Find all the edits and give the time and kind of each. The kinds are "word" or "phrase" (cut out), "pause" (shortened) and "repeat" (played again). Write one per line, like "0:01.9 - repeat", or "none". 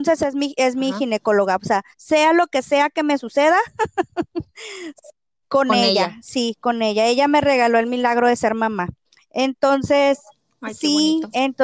0:01.9 - pause
0:09.1 - pause

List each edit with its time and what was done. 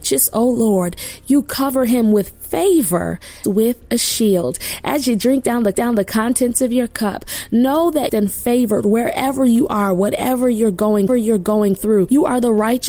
0:03.4 - word
0:05.7 - repeat
0:08.1 - phrase
0:11.1 - repeat

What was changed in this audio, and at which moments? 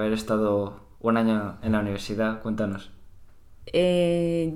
0:01.6 - word

